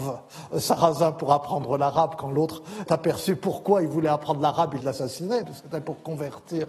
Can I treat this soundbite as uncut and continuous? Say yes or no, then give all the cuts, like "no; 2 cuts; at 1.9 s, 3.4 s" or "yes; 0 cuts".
no; 3 cuts; at 2.9 s, 4.8 s, 5.4 s